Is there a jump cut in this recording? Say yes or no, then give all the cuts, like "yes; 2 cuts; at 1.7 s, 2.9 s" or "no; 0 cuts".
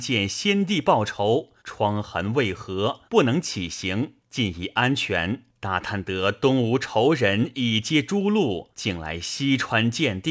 yes; 5 cuts; at 1.6 s, 3.1 s, 4.2 s, 5.5 s, 8.7 s